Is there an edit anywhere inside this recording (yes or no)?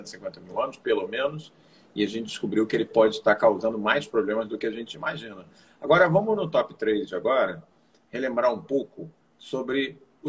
no